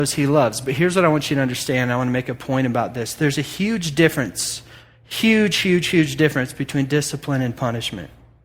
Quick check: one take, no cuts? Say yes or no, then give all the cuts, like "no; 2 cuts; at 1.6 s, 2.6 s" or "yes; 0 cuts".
yes; 0 cuts